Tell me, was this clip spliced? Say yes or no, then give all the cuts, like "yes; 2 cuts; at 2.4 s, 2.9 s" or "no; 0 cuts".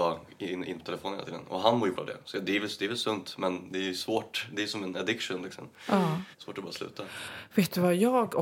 yes; 2 cuts; at 1.9 s, 6.3 s